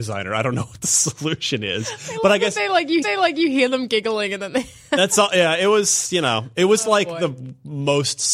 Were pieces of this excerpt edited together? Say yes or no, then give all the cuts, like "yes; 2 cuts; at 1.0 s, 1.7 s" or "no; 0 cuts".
yes; 1 cut; at 3.0 s